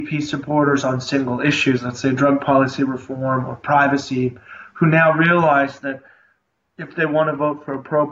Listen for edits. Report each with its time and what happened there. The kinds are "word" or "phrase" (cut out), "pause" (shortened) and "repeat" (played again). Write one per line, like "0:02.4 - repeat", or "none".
none